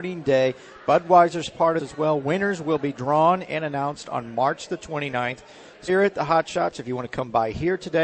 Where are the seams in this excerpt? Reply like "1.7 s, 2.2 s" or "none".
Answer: 1.8 s, 5.9 s